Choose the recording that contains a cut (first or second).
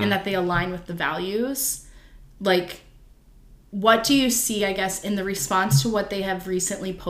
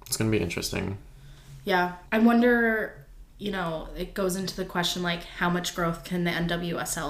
second